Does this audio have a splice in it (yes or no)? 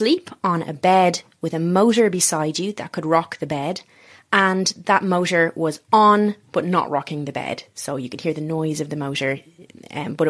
no